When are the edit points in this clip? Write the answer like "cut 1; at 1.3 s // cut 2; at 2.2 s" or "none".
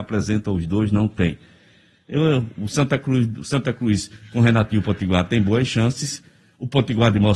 none